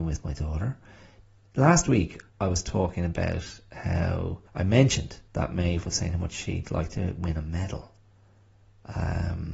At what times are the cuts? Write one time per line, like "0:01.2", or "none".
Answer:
0:02.3
0:04.5
0:05.3